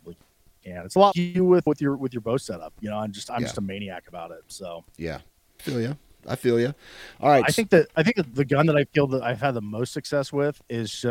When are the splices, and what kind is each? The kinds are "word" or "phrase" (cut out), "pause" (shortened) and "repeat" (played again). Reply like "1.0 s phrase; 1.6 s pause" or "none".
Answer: 1.1 s word; 1.7 s word; 5.6 s word